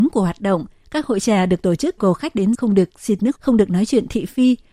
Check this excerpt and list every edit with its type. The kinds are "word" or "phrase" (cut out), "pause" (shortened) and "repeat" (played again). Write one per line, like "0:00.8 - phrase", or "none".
0:02.0 - phrase
0:02.5 - word
0:03.4 - word